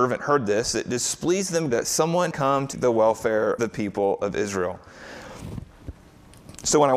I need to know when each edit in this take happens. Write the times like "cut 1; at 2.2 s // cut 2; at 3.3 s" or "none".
cut 1; at 1.7 s // cut 2; at 2.3 s // cut 3; at 2.7 s // cut 4; at 3.6 s